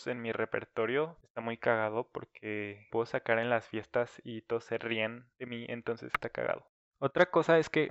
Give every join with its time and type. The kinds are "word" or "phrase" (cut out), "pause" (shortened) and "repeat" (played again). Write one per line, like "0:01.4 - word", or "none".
none